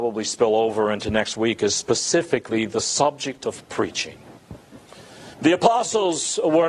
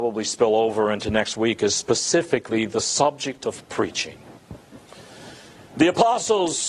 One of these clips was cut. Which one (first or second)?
first